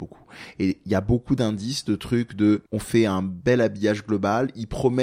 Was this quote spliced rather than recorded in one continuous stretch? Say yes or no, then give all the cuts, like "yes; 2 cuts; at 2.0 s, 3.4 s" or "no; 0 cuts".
yes; 1 cut; at 2.7 s